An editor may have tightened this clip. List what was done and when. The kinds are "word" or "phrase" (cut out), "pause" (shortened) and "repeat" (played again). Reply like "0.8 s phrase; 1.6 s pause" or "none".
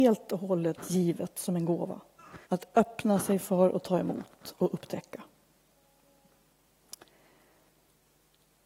2.4 s pause